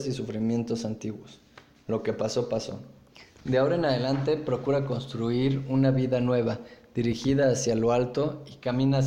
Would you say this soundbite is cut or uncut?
uncut